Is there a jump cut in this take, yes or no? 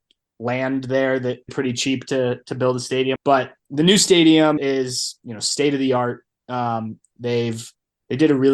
yes